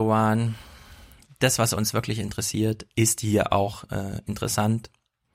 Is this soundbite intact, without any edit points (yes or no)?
yes